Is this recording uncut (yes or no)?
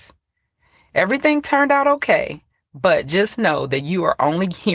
yes